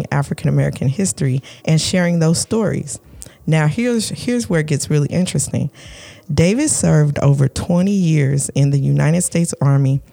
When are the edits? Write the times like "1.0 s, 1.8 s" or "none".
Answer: 1.6 s